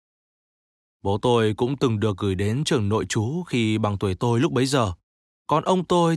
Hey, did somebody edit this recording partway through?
no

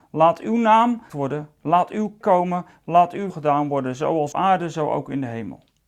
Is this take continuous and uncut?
no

